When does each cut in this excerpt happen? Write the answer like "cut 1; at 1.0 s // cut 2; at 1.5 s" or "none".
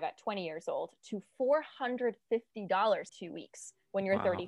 cut 1; at 3.1 s